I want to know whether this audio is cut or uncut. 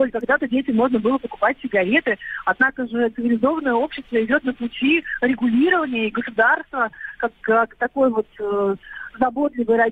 uncut